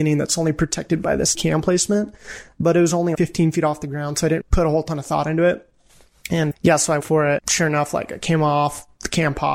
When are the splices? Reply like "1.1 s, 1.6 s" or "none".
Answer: 1.3 s, 3.1 s, 4.4 s, 6.5 s, 7.0 s, 7.4 s